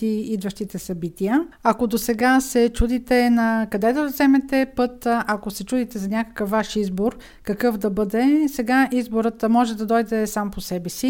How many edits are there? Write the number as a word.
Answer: one